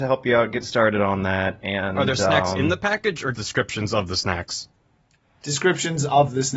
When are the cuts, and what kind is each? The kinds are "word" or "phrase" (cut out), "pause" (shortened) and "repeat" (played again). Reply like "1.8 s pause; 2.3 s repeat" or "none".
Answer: 3.3 s word